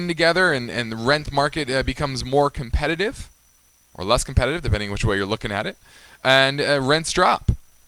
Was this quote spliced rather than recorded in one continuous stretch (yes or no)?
no